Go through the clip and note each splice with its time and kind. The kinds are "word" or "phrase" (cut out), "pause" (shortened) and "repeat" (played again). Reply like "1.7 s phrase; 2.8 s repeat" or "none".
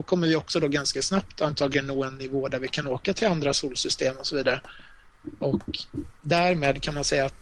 none